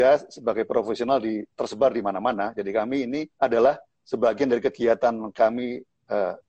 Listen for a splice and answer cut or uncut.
cut